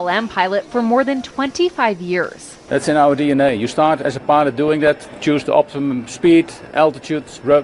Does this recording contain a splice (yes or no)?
no